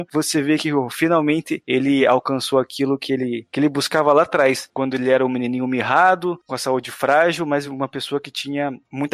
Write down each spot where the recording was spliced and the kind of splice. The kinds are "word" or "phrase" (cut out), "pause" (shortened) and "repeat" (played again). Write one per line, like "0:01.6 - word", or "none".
none